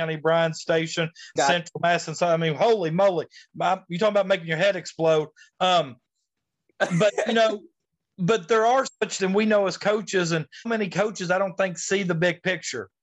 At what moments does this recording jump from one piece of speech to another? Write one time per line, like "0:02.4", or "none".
0:01.4
0:09.2
0:10.6